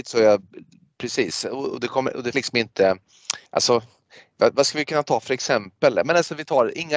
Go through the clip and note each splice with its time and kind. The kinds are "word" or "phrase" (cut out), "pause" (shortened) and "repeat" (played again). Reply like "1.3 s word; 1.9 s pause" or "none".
2.3 s word; 3.5 s pause